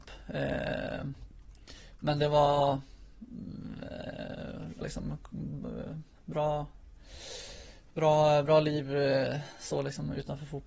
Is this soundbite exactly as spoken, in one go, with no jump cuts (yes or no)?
no